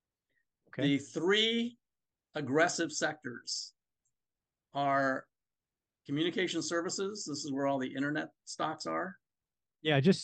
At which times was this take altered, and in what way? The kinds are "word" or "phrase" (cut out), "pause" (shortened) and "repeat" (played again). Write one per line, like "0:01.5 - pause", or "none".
none